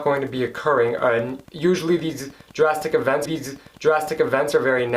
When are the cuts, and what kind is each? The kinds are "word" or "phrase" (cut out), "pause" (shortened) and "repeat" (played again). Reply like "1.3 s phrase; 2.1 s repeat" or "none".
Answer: 1.4 s pause; 3.3 s repeat